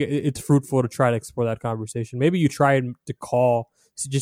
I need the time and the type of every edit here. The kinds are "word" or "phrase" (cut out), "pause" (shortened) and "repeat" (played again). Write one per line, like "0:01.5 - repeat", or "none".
none

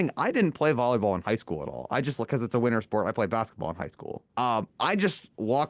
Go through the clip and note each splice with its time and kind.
0:04.3 - pause

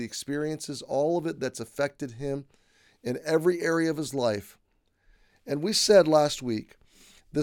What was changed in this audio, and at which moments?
none

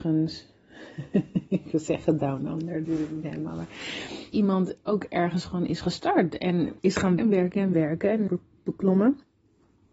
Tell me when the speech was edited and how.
0:02.8 - word
0:04.3 - word
0:06.8 - pause
0:07.2 - word
0:07.7 - phrase
0:08.3 - phrase

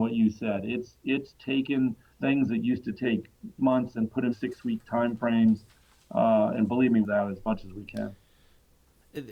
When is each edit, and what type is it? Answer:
0:02.1 - pause
0:03.6 - phrase
0:04.3 - word
0:07.0 - phrase

